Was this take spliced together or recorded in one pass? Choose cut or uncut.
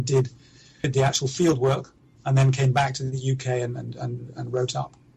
uncut